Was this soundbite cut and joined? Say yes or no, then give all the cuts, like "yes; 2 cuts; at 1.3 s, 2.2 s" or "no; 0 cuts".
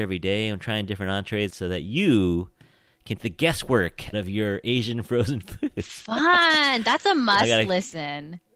yes; 3 cuts; at 1.5 s, 3.2 s, 4.1 s